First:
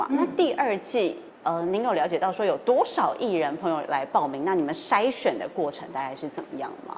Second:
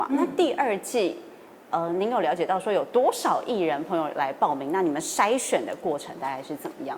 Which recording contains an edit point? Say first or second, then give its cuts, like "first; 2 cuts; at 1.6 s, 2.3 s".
first; 1 cut; at 1.3 s